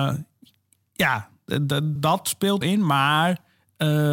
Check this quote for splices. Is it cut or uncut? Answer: cut